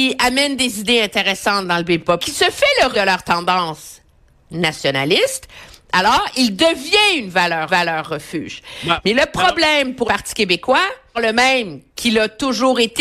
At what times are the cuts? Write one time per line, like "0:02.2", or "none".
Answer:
0:02.2
0:02.9
0:07.7
0:10.0
0:11.1
0:11.9